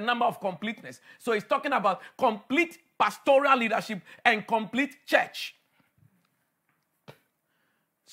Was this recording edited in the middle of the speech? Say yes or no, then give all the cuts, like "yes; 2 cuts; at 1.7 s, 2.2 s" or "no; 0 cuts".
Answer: no; 0 cuts